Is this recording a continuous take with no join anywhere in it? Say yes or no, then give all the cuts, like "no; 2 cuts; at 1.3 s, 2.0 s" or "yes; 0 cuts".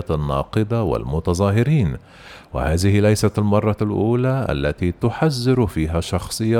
yes; 0 cuts